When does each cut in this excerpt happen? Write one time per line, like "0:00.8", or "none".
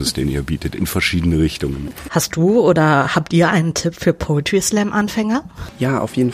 none

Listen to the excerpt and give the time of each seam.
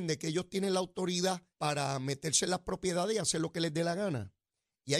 0:01.5

